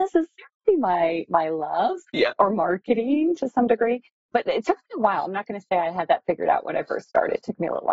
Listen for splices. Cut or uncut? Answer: uncut